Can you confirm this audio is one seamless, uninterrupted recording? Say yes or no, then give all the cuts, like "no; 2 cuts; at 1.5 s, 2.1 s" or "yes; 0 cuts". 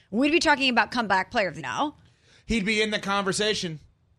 no; 1 cut; at 1.6 s